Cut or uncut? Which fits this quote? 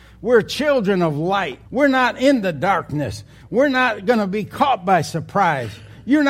cut